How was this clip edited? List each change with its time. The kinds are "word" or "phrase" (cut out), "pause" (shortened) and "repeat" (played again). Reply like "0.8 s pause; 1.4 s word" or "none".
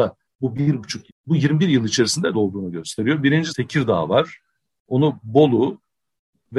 1.1 s word; 2.3 s phrase; 3.5 s word